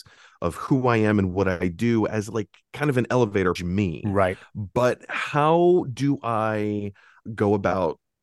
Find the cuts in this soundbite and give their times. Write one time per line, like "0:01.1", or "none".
0:03.6